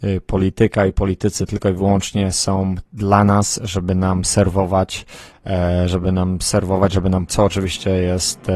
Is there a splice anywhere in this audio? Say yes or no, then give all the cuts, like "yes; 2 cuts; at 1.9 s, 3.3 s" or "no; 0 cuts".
yes; 2 cuts; at 2.9 s, 7.3 s